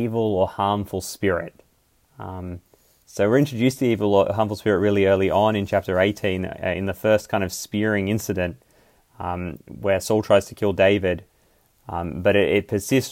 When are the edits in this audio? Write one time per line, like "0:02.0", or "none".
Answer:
none